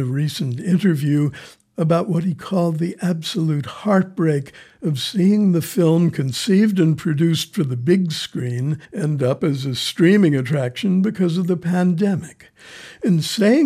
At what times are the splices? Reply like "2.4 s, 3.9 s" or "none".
8.8 s